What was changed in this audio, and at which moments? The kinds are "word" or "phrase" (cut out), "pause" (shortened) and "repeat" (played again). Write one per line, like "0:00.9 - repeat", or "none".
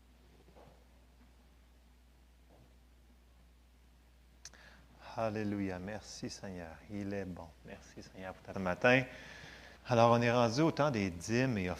0:07.5 - pause
0:08.5 - word
0:09.8 - pause